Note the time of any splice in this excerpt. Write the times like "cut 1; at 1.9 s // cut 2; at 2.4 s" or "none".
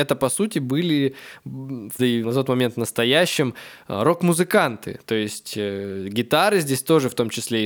cut 1; at 2.0 s